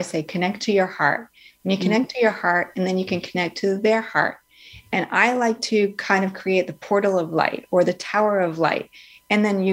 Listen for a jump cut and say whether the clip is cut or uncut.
uncut